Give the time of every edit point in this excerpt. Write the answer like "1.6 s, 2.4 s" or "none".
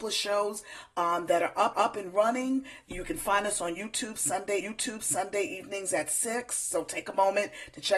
1.7 s, 4.6 s